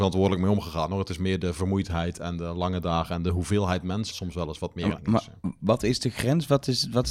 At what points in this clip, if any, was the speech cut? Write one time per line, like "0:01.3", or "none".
0:04.1
0:05.0